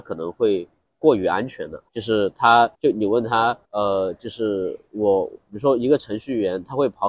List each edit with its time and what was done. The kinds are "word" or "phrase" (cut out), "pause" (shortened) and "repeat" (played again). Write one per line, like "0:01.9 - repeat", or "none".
0:01.9 - pause
0:02.7 - pause
0:03.6 - pause